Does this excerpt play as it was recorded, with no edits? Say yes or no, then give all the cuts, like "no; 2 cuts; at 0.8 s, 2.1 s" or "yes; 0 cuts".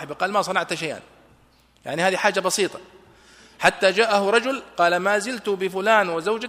yes; 0 cuts